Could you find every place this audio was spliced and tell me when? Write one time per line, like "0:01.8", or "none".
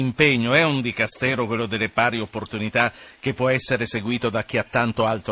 none